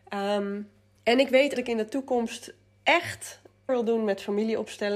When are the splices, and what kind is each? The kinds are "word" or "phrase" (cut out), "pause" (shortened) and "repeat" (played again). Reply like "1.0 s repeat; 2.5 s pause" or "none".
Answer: 1.0 s pause; 1.5 s phrase; 3.7 s word

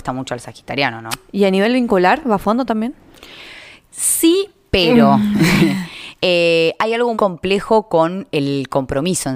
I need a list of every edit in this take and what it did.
7.1 s word

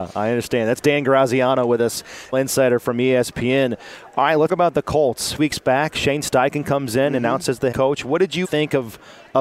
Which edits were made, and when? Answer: 2.3 s word; 4.5 s word; 5.4 s word; 7.7 s word; 8.4 s word

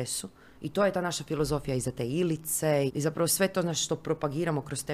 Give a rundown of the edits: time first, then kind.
2.9 s word

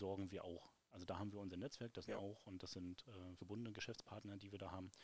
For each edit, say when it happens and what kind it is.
2.1 s word; 3.4 s word

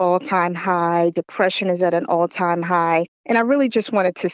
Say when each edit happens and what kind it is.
3.2 s pause

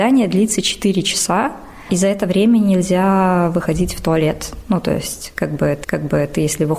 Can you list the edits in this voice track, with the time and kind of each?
5.8 s repeat

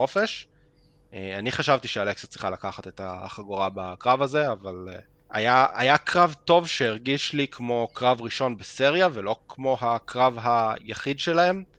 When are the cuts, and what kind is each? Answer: 5.2 s pause

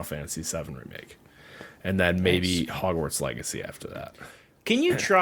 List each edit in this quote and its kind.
none

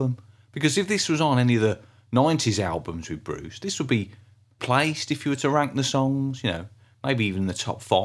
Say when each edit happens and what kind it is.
4.6 s word

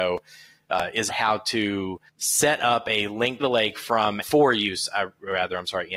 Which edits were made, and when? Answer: 1.1 s word; 2.1 s pause; 3.4 s phrase; 4.2 s phrase

